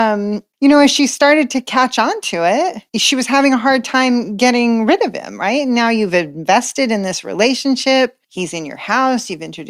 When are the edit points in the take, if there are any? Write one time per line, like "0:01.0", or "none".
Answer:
0:02.9
0:08.2